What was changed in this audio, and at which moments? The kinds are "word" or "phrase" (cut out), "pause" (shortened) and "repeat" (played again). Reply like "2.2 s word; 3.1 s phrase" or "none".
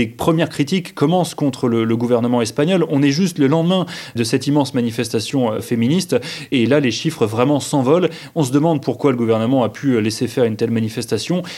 none